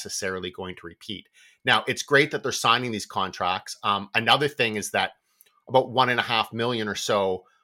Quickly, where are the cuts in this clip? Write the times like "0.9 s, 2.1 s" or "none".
none